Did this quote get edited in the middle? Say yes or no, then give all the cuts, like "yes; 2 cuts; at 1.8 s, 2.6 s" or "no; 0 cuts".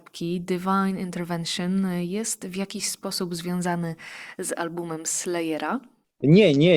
no; 0 cuts